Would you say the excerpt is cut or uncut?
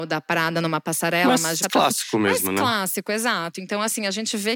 cut